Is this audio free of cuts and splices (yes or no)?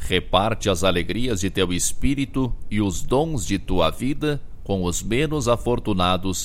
yes